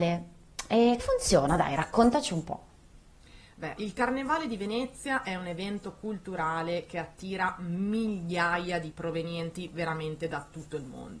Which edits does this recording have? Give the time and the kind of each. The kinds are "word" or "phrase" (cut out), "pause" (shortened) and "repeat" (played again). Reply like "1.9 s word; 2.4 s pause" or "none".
1.0 s word; 3.8 s word; 8.9 s word